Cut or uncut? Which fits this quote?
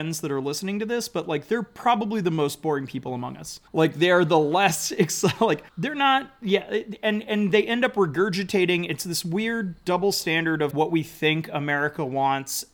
cut